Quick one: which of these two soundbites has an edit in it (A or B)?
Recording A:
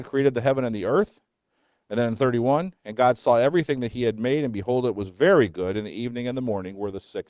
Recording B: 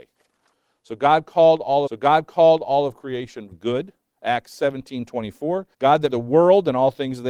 B